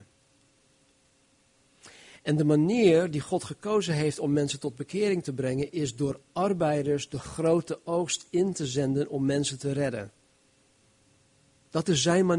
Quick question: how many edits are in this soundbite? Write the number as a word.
zero